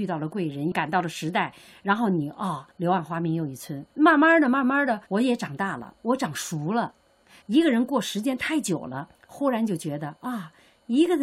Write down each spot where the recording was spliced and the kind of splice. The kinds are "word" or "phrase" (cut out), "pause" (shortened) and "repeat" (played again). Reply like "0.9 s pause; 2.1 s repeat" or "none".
2.7 s pause; 3.9 s pause; 5.1 s pause; 9.1 s pause